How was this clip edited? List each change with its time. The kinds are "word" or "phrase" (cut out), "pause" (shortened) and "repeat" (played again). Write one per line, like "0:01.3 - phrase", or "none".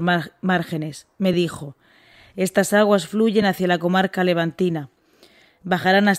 none